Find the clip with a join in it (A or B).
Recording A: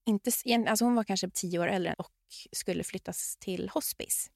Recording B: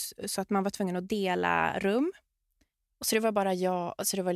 A